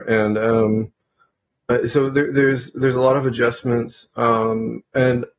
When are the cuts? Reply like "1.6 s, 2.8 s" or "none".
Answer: none